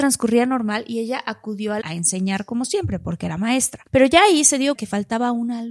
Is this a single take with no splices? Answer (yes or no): no